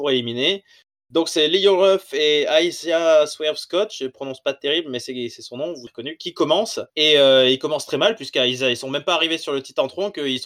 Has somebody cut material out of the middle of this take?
yes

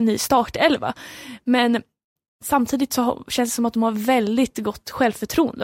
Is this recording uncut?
yes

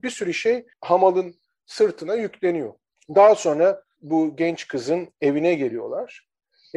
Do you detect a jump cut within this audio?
no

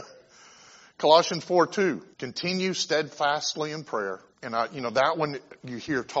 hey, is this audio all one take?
no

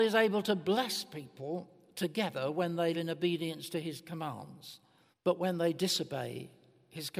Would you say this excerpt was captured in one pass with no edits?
no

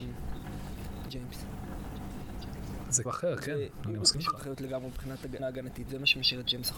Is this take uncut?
no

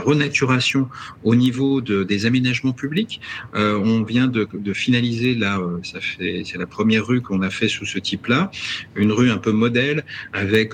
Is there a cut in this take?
no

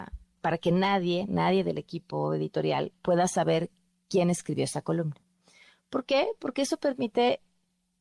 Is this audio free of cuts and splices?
yes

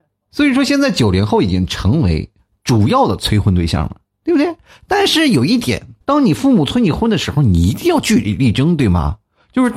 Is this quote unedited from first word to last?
no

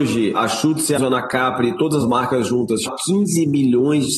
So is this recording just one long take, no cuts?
no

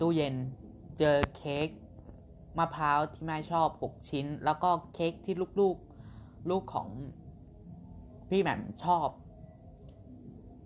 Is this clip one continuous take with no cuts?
yes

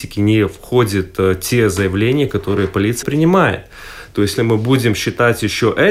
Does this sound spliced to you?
yes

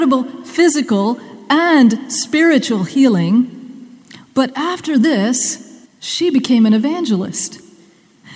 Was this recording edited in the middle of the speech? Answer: yes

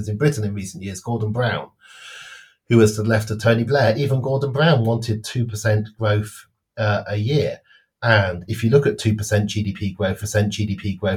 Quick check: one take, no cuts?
no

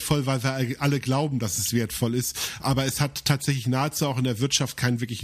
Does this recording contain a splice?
no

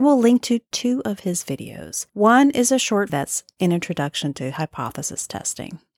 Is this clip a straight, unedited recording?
no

